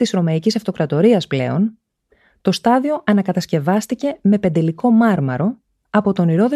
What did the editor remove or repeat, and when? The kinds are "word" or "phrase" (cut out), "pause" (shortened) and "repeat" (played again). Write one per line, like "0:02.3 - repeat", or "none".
none